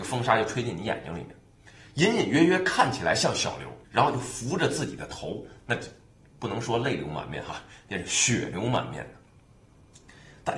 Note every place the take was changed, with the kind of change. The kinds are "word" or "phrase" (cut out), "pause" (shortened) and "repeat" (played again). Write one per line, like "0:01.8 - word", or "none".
0:03.8 - pause